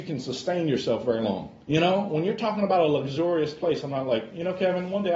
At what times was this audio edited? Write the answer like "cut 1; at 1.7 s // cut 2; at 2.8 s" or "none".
cut 1; at 1.6 s